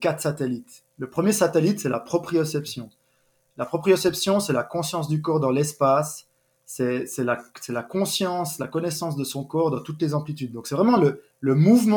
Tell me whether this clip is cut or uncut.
uncut